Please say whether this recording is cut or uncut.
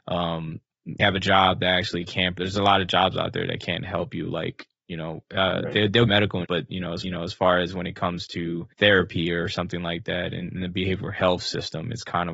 cut